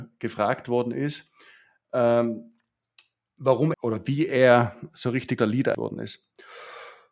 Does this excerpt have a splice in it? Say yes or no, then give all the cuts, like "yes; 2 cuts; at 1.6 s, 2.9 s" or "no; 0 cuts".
yes; 3 cuts; at 3.7 s, 5.4 s, 5.7 s